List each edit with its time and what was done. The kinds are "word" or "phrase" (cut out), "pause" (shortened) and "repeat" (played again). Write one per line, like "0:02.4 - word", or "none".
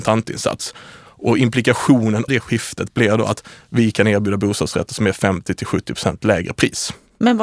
0:02.3 - word

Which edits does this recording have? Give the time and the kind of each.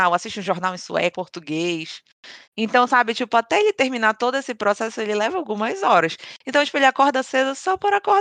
0:01.1 - phrase
0:02.4 - pause

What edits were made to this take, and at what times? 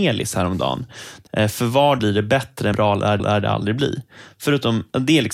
0:01.3 - phrase
0:02.0 - word
0:02.7 - word
0:03.2 - repeat

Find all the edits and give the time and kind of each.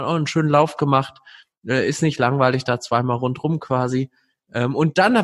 none

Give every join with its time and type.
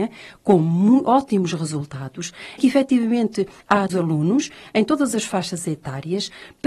0:02.6 - word
0:03.9 - phrase

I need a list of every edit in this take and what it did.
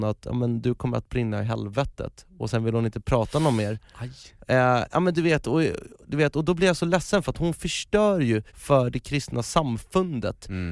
0:08.5 - pause

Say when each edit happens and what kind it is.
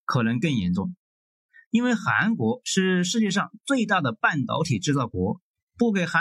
none

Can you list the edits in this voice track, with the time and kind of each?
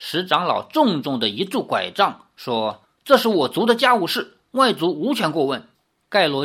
0:02.8 - pause

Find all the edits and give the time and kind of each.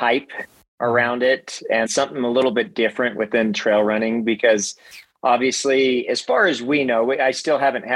0:01.9 - word

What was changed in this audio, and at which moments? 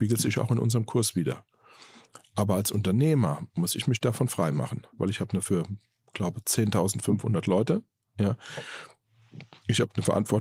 0:05.0 - word
0:05.4 - word

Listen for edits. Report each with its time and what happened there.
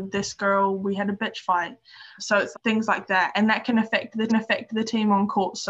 0:02.2 - word
0:02.5 - word
0:04.3 - repeat

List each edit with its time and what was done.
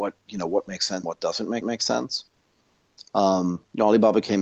0:01.0 - word
0:01.6 - repeat

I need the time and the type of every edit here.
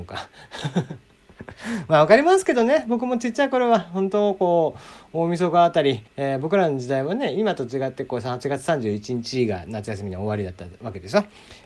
0:06.1 - pause

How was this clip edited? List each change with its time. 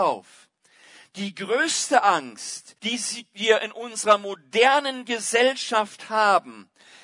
0:02.8 - pause

